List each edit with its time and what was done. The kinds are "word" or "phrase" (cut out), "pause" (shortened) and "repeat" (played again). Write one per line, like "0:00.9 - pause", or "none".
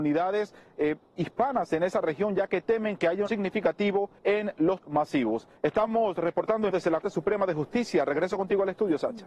0:03.3 - word
0:04.2 - pause
0:04.8 - word
0:05.6 - pause
0:06.7 - word
0:07.0 - word